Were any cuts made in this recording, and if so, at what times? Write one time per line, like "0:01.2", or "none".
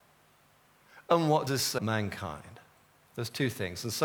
0:01.5
0:01.8

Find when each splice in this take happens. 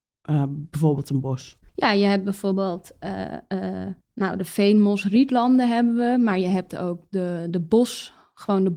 0:01.7
0:04.0

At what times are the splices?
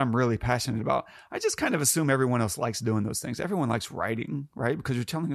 none

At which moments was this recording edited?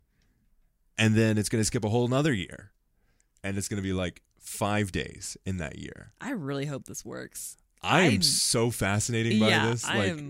none

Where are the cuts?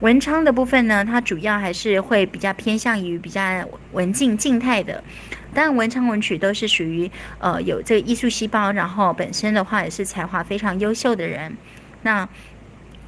0:05.5

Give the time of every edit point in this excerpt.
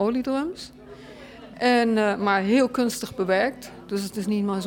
none

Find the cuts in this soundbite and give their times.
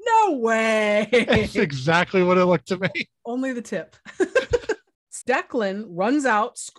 0:02.6
0:05.2

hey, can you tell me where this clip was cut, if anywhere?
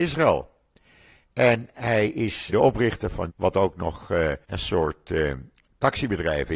0:02.5
0:03.3
0:04.4

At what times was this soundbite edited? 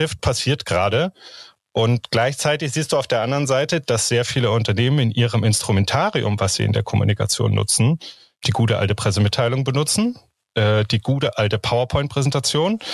none

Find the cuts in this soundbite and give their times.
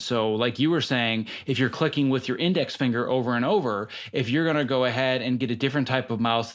none

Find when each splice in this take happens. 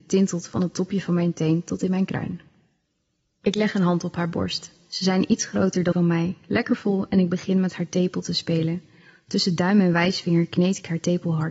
0:05.9

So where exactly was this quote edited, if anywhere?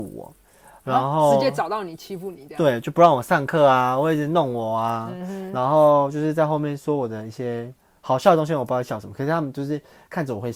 none

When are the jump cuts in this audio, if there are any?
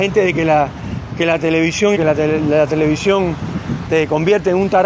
0:01.9
0:03.9

